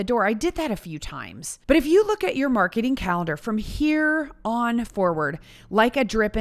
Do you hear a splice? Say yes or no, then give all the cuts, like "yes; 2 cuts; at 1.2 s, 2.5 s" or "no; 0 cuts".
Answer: yes; 1 cut; at 1.6 s